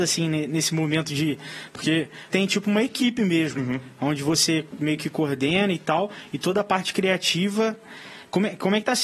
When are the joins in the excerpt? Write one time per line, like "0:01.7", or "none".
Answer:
0:02.3
0:03.6